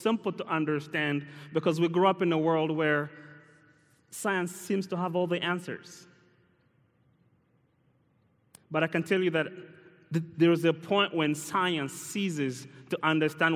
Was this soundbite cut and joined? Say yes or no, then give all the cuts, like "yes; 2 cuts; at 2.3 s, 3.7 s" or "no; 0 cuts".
no; 0 cuts